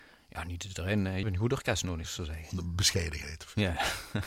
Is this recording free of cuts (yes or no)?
no